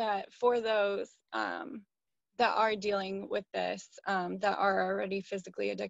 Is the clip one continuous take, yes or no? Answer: yes